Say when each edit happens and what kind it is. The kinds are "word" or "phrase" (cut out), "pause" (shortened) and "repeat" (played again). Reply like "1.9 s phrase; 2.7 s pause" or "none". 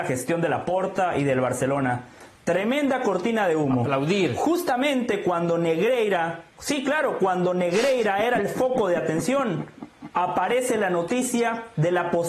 6.5 s pause